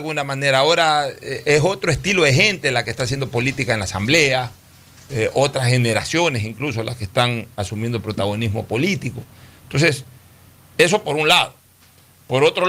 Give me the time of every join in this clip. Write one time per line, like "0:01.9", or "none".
none